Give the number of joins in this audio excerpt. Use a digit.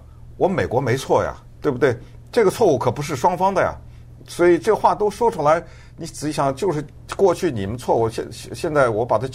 1